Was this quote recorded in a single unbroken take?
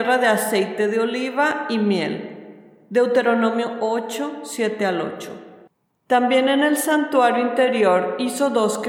yes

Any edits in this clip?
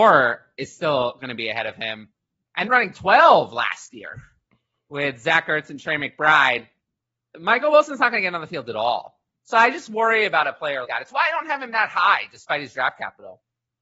yes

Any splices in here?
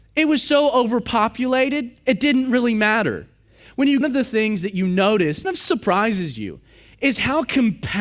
yes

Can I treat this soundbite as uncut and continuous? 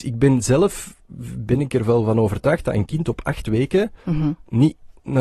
no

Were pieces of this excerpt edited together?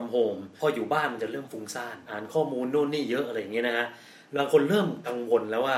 no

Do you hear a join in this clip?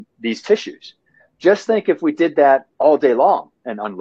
no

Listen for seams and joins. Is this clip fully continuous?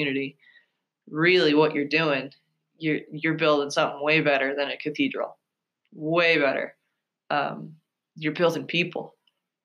yes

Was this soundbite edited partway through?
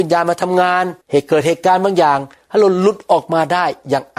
yes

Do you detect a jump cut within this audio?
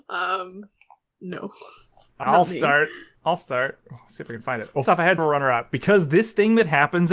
yes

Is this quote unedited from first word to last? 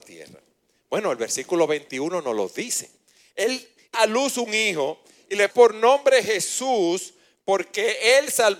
no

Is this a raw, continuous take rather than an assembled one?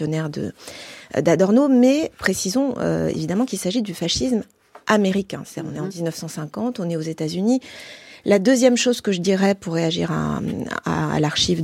yes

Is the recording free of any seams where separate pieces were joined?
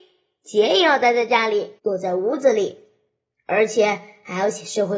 no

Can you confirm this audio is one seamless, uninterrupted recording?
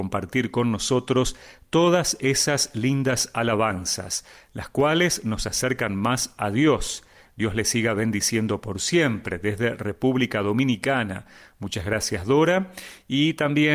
yes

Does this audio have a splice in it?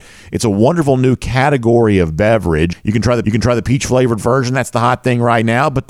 yes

